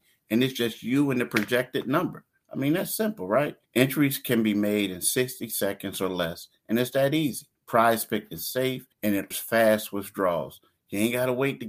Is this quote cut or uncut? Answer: cut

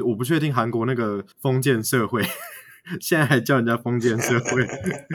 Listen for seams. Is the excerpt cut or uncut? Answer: cut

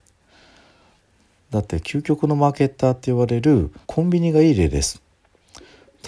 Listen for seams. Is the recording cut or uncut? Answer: cut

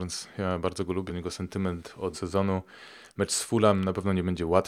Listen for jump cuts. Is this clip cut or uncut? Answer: cut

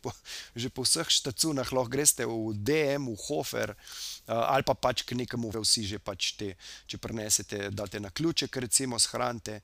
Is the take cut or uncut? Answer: cut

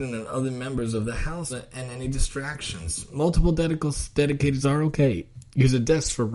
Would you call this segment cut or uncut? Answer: cut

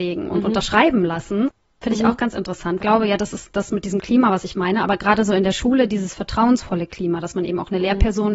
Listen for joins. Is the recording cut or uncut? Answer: cut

